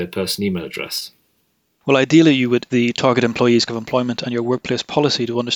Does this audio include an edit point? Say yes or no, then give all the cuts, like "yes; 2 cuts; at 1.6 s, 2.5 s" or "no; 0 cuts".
yes; 2 cuts; at 2.7 s, 3.7 s